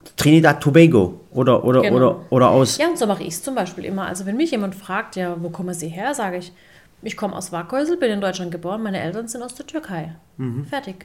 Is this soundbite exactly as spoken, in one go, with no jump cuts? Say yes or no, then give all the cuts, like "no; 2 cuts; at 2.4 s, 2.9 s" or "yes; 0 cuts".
yes; 0 cuts